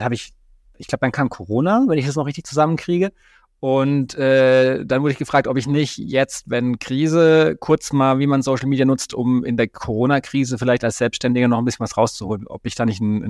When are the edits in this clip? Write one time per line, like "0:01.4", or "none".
none